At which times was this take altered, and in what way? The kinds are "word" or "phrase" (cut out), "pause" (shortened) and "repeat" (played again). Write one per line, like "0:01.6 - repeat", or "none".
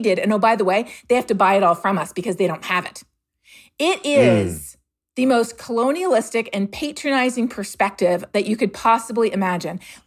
none